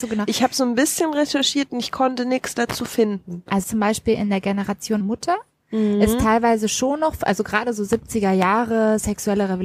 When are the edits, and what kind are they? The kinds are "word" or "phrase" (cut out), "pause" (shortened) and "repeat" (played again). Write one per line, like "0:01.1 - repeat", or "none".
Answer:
0:03.6 - phrase
0:05.0 - word